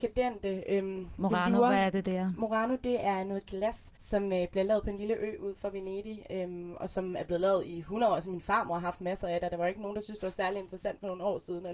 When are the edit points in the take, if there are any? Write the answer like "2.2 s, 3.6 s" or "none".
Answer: 4.0 s